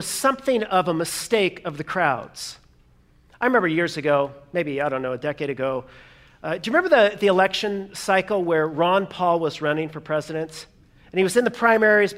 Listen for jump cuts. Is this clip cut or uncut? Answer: uncut